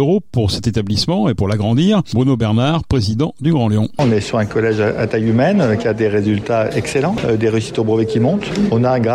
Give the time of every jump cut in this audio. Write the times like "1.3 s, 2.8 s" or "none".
none